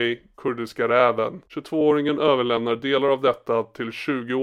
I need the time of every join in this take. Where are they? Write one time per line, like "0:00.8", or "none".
0:01.5